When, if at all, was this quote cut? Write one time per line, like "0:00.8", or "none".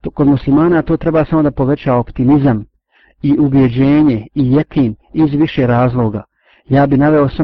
none